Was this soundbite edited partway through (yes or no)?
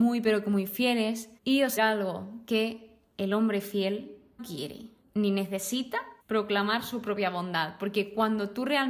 yes